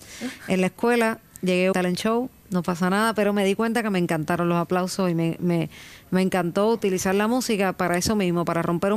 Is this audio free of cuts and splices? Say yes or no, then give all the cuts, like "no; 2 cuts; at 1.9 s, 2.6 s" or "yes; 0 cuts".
no; 1 cut; at 1.7 s